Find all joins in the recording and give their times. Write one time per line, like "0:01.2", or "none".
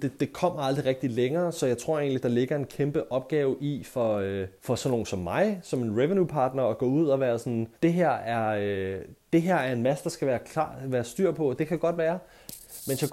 0:04.6
0:07.7